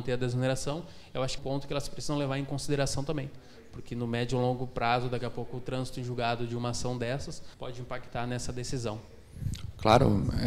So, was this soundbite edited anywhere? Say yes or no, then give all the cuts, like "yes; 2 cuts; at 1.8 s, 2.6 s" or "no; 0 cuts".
yes; 2 cuts; at 1.4 s, 7.5 s